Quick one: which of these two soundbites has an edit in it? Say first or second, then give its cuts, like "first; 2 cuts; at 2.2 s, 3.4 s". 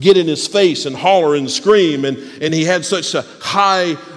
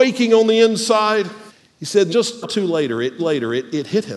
second; 4 cuts; at 1.5 s, 2.1 s, 2.4 s, 3.2 s